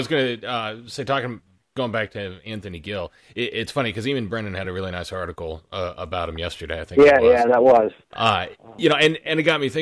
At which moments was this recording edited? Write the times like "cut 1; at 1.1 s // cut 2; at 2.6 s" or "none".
none